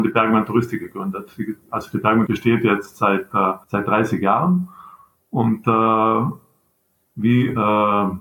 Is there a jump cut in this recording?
yes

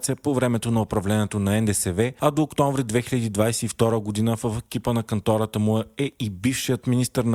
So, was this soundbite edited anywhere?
no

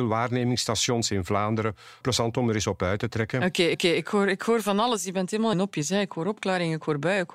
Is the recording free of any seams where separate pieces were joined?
no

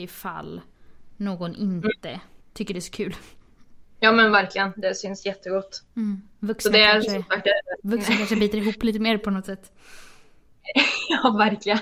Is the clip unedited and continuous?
no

